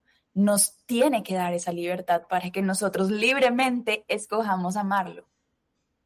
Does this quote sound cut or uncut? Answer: uncut